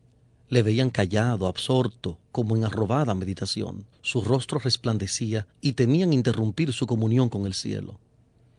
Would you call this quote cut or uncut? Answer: cut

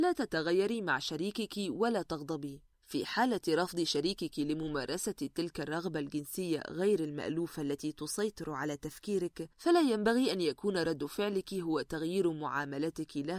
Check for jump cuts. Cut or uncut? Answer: cut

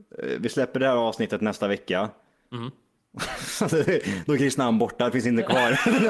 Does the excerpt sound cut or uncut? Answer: uncut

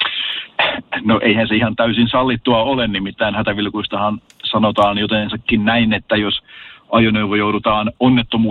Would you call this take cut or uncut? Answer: uncut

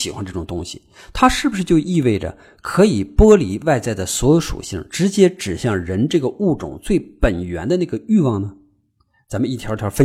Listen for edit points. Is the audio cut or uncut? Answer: uncut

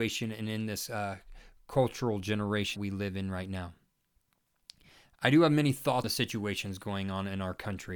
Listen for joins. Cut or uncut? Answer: cut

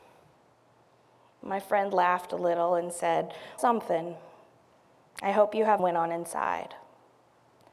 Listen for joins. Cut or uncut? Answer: cut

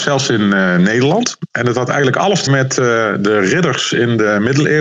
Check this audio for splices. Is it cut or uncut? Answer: cut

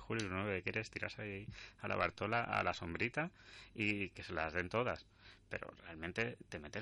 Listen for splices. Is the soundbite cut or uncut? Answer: uncut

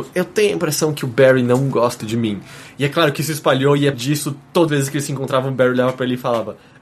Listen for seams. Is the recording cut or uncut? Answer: cut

